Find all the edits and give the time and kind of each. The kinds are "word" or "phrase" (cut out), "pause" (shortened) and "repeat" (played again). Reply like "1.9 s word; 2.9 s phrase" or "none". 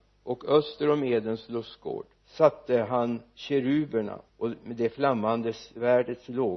2.2 s pause; 4.3 s pause